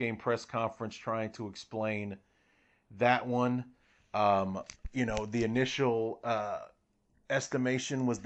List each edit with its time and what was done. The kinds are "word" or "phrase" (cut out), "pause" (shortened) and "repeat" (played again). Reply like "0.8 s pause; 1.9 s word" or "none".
none